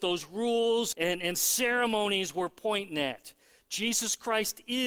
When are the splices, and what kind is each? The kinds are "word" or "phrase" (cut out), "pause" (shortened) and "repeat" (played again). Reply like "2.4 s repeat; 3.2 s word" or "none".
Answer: 0.9 s phrase